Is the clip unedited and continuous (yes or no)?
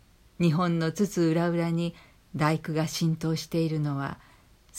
yes